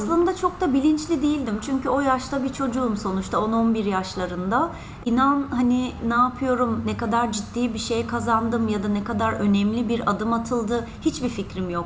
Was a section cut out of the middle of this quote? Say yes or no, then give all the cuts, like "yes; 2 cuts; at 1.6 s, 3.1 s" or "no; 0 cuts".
no; 0 cuts